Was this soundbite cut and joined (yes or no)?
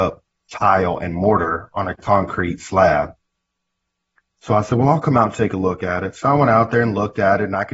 no